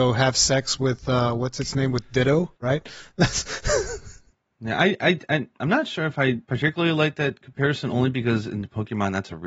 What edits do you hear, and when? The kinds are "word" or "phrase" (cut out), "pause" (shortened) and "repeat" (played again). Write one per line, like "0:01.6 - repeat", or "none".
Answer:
0:02.6 - pause
0:06.4 - pause